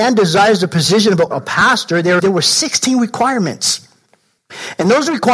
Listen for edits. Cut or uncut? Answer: cut